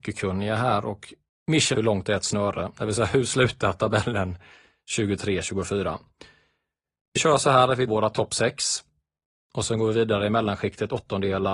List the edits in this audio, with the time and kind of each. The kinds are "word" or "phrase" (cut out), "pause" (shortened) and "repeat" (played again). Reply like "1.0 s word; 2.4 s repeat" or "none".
1.7 s phrase; 7.2 s word; 7.9 s word